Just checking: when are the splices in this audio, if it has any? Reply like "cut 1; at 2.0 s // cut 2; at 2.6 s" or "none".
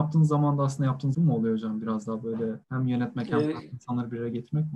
cut 1; at 1.1 s // cut 2; at 2.6 s